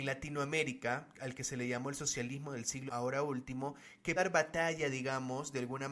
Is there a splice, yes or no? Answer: yes